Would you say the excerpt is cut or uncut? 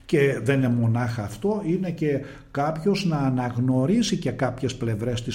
uncut